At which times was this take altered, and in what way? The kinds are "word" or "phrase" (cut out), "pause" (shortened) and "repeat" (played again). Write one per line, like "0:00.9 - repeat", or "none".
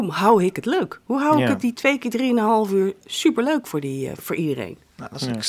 0:01.7 - word
0:04.2 - word